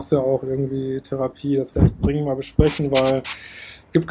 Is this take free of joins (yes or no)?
no